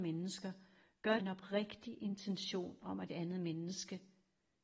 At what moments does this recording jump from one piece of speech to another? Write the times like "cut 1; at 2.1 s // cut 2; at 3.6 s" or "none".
cut 1; at 1.2 s // cut 2; at 3.1 s